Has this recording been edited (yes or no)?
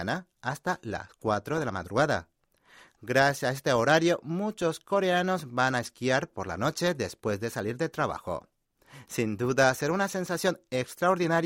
no